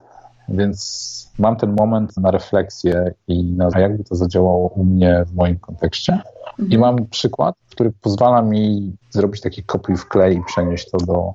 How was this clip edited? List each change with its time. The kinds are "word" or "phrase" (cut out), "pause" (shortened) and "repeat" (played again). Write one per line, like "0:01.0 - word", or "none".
0:02.2 - word
0:03.7 - phrase
0:06.5 - pause
0:09.0 - pause